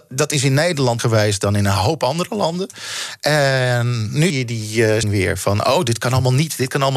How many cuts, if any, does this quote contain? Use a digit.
3